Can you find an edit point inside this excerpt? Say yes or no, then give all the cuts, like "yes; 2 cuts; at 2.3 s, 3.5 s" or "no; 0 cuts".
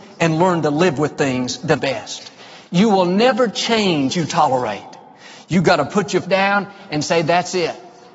yes; 3 cuts; at 1.8 s, 4.1 s, 6.2 s